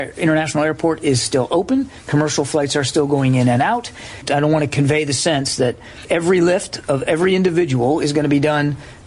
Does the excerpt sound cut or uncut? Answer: uncut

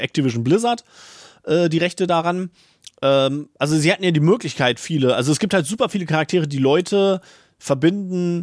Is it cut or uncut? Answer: uncut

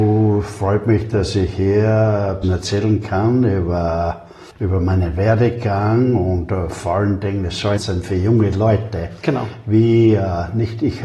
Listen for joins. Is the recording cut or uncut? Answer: cut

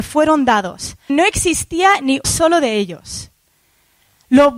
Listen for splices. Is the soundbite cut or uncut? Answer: cut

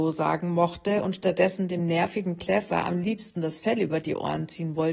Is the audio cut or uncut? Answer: uncut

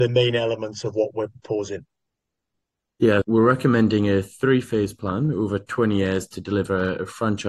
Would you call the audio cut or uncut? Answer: cut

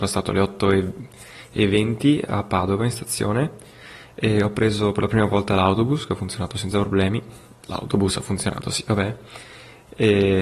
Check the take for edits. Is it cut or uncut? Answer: uncut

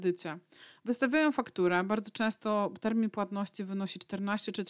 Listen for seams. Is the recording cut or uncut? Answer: uncut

